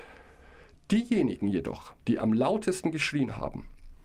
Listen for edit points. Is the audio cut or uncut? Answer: cut